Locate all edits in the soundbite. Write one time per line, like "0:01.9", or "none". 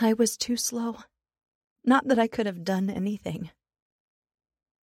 none